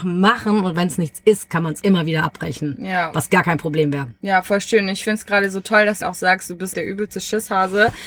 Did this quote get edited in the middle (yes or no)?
yes